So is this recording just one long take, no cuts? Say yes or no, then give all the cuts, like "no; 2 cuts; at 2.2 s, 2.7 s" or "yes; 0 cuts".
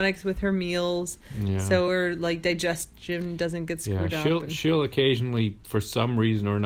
yes; 0 cuts